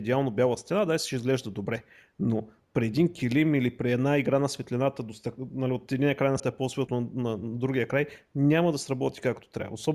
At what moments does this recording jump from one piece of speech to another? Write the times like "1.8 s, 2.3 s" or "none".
2.6 s, 6.4 s, 6.9 s

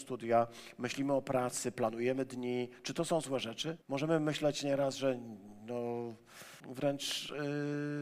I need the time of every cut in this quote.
3.8 s, 6.6 s

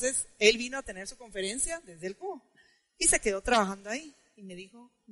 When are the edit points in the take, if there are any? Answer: none

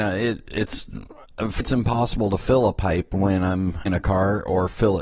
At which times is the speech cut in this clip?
1.6 s, 3.9 s

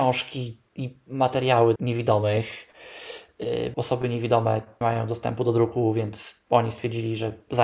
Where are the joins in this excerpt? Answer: 1.8 s, 3.7 s, 4.8 s

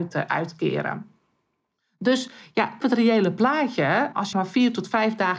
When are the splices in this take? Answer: 2.8 s, 4.3 s

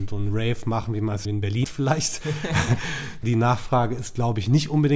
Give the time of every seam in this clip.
1.3 s, 1.6 s, 3.2 s

